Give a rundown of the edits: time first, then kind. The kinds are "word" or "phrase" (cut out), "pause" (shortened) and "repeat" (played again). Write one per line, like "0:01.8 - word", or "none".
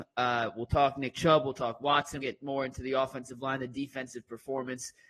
0:02.2 - word